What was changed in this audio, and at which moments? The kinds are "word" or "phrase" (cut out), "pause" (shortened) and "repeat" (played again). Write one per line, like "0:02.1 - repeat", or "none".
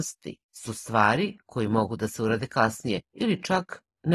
0:03.0 - pause